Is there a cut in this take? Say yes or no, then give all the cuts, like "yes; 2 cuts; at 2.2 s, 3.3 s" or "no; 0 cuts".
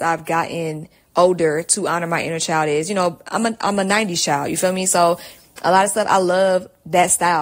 no; 0 cuts